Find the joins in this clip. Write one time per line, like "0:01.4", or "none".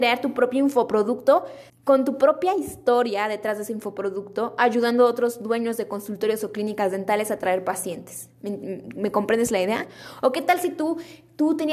0:01.7